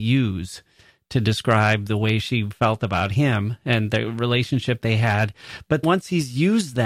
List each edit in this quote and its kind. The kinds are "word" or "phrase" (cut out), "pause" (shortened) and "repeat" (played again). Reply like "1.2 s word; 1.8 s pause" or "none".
4.8 s word; 5.8 s word